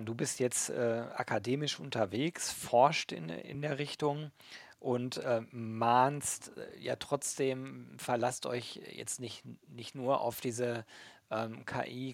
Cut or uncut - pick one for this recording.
uncut